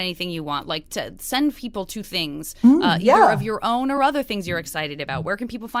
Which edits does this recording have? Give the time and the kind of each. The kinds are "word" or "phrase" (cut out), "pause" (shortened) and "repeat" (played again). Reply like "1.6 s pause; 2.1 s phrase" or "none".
none